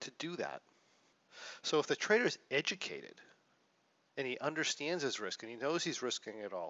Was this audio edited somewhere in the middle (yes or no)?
no